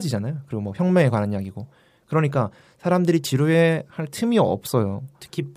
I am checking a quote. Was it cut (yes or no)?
no